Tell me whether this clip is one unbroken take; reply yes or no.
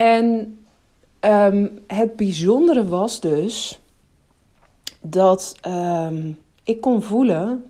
yes